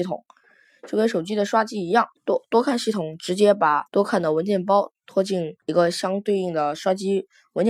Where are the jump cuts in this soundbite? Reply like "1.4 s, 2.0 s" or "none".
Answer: 2.2 s, 3.9 s, 5.6 s